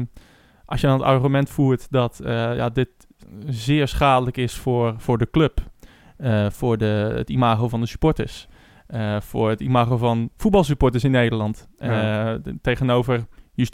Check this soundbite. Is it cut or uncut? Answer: uncut